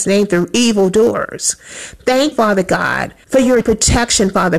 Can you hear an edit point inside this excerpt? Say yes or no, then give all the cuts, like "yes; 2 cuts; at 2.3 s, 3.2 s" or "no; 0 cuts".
yes; 3 cuts; at 2.3 s, 3.2 s, 3.6 s